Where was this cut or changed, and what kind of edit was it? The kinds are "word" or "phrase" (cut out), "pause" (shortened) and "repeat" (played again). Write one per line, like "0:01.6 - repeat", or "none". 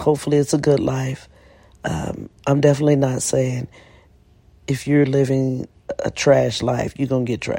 none